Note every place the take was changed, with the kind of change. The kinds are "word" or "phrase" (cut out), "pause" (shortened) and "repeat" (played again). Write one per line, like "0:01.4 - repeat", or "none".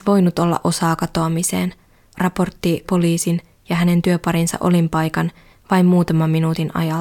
0:02.1 - word
0:02.8 - word